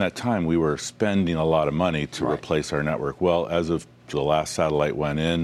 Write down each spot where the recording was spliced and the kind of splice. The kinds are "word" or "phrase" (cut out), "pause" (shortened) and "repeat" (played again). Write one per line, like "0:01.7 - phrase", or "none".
0:04.1 - phrase